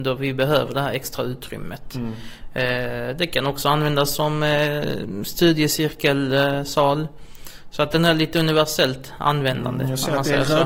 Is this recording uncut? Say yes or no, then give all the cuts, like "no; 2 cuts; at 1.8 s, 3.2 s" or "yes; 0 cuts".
yes; 0 cuts